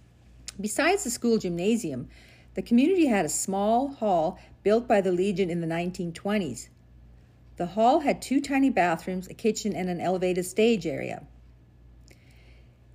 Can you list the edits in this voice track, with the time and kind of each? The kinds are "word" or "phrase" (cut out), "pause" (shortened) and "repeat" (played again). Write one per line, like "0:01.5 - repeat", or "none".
none

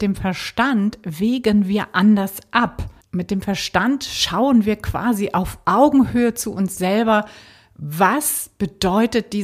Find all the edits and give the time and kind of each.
0:03.0 - pause

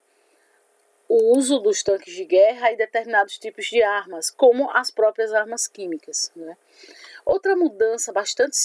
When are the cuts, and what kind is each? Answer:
none

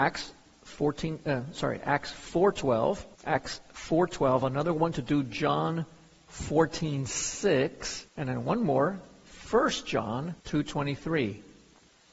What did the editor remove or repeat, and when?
0:03.2 - pause
0:08.1 - pause
0:10.4 - pause

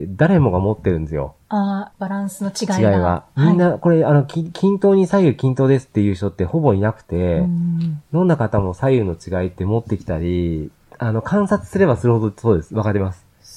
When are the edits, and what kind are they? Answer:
0:01.4 - pause
0:01.9 - phrase

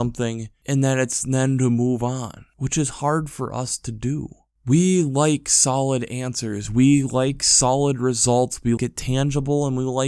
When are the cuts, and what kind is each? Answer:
0:08.8 - word

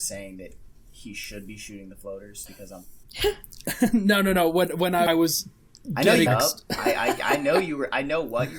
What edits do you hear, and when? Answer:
0:02.5 - word
0:03.0 - pause
0:05.1 - phrase
0:06.3 - phrase

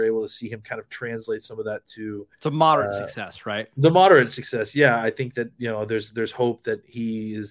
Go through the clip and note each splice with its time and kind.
0:02.3 - pause

